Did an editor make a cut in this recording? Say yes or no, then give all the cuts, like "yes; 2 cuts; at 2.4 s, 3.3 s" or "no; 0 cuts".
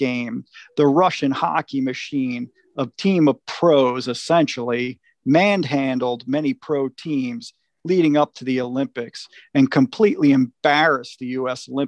no; 0 cuts